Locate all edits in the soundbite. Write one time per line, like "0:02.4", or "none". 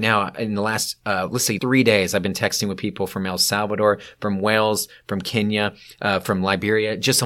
0:01.6